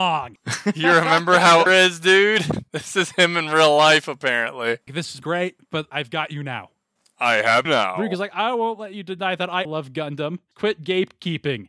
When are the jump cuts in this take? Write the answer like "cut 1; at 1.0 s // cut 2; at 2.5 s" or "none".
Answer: cut 1; at 1.7 s // cut 2; at 5.2 s // cut 3; at 7.6 s // cut 4; at 9.6 s